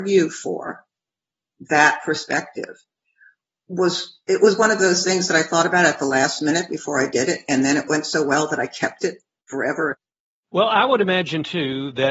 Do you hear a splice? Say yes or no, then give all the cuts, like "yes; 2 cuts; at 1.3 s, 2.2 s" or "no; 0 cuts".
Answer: no; 0 cuts